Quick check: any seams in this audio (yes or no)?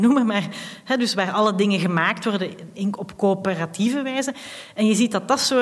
no